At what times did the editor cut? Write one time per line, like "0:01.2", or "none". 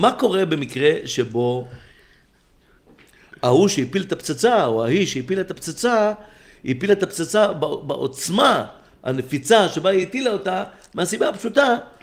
none